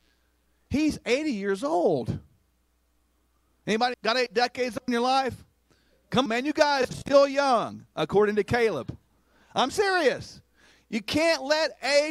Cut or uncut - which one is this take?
cut